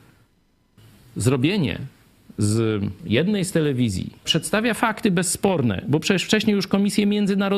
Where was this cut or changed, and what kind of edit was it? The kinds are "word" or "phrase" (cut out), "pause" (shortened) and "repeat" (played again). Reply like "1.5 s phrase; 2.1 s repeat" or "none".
3.0 s word; 4.2 s word